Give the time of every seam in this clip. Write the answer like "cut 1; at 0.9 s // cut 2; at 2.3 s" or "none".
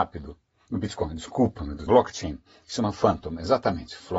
cut 1; at 1.9 s